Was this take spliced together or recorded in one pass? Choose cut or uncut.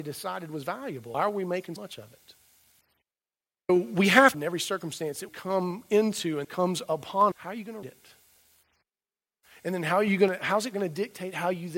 cut